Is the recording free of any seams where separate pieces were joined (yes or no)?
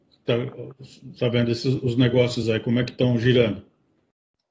yes